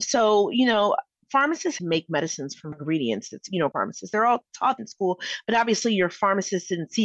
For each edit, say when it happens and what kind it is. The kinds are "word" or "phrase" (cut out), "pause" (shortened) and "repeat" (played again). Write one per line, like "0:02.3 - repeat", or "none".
0:01.8 - phrase
0:02.7 - word
0:03.7 - word
0:04.8 - word